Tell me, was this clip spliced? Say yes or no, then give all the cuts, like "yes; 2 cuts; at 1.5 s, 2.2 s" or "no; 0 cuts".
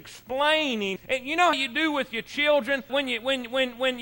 yes; 3 cuts; at 1.0 s, 1.5 s, 2.9 s